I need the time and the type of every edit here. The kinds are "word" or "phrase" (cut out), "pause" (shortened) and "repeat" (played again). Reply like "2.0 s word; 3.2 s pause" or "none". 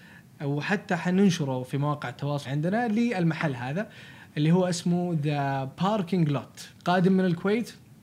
2.4 s word; 6.8 s pause